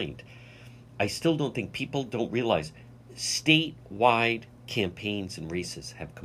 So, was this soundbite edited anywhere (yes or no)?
no